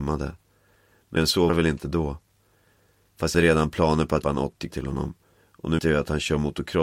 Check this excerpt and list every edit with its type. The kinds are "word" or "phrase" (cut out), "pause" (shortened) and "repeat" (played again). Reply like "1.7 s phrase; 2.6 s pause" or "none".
1.2 s word; 1.5 s word; 3.3 s word; 4.2 s word; 4.7 s word; 5.8 s word